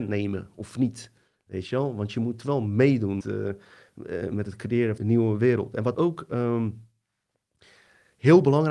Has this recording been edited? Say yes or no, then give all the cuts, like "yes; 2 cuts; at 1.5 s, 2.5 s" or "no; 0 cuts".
yes; 3 cuts; at 3.2 s, 5.0 s, 5.9 s